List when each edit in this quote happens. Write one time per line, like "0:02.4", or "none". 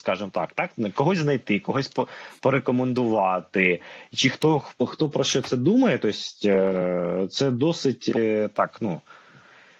none